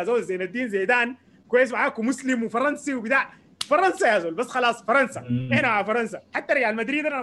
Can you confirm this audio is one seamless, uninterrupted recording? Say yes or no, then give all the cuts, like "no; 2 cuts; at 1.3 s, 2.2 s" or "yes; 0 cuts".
yes; 0 cuts